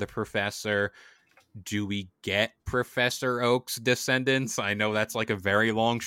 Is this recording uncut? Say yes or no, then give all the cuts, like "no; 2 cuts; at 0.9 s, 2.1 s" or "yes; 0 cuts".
yes; 0 cuts